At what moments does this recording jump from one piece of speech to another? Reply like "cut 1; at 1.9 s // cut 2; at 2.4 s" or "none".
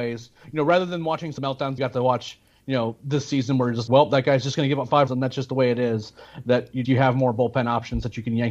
cut 1; at 1.4 s // cut 2; at 1.8 s // cut 3; at 3.9 s // cut 4; at 5.1 s // cut 5; at 6.8 s